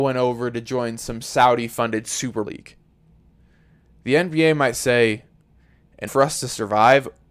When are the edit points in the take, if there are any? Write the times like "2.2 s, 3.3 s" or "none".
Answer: 2.4 s, 6.1 s